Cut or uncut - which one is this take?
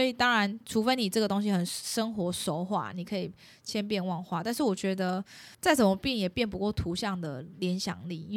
cut